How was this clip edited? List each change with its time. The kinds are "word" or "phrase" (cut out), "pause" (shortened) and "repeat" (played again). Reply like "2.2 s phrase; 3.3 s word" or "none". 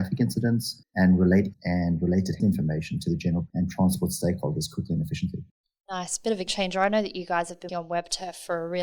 1.5 s word; 2.4 s word; 3.5 s word; 6.5 s word; 7.7 s word